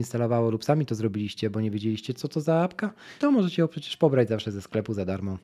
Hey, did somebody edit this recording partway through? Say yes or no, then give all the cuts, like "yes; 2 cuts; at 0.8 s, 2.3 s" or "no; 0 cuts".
yes; 1 cut; at 3.2 s